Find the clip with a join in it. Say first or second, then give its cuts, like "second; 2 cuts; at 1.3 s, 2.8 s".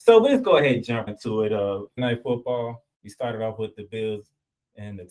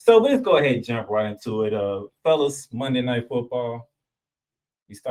first; 3 cuts; at 1.1 s, 2.0 s, 2.9 s